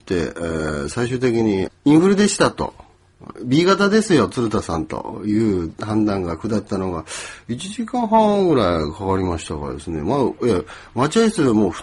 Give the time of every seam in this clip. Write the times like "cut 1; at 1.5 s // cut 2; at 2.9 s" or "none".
cut 1; at 1.7 s